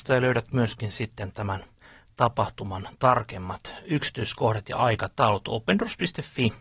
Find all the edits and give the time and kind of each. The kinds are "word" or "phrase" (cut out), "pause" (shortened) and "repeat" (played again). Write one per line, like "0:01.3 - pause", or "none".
none